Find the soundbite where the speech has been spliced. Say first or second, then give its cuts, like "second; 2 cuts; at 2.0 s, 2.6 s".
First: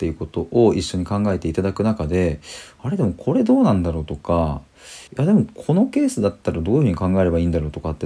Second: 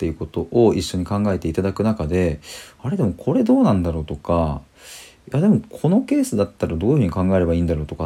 first; 1 cut; at 5.1 s